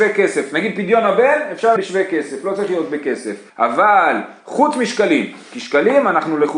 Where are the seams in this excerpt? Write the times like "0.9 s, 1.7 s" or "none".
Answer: 1.8 s, 3.5 s